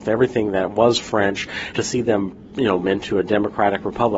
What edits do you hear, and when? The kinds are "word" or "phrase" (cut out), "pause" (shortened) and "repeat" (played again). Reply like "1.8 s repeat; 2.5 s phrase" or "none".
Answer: 1.7 s phrase; 2.8 s word